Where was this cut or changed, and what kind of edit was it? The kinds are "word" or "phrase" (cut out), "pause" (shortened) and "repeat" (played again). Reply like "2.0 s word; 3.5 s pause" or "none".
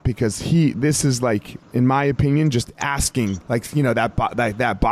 1.6 s pause; 3.4 s pause